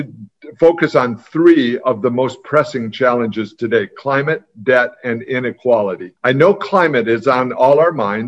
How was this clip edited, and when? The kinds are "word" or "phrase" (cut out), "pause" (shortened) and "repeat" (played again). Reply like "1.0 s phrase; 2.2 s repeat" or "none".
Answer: 6.2 s pause